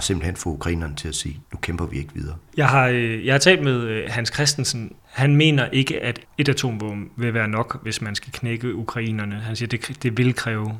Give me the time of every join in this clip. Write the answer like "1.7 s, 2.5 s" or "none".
1.4 s, 2.5 s, 5.0 s